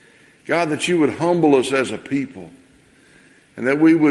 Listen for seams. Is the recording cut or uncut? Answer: uncut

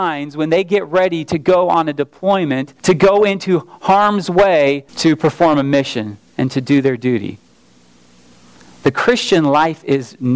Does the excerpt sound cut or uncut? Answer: cut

